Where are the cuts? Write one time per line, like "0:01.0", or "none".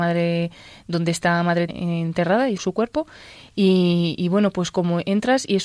0:01.7
0:02.6